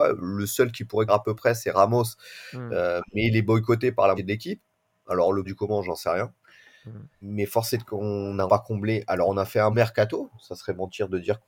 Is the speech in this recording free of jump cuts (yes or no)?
no